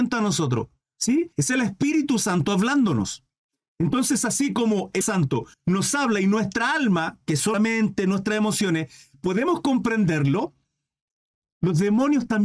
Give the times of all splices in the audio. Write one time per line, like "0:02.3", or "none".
0:01.3
0:05.0
0:05.5
0:07.5

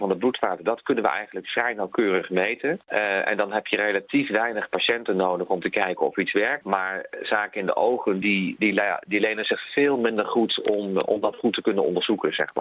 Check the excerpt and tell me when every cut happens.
none

